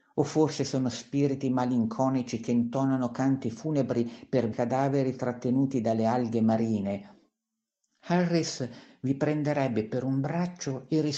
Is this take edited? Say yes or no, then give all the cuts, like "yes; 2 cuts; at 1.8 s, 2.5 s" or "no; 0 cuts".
yes; 1 cut; at 4.5 s